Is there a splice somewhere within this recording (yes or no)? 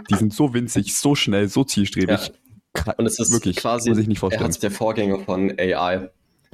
yes